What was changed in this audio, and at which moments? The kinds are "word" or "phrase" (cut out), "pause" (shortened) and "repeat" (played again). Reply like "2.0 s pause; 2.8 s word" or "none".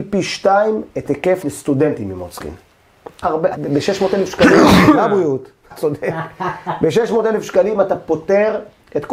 1.4 s phrase; 3.2 s phrase; 3.6 s phrase; 5.7 s word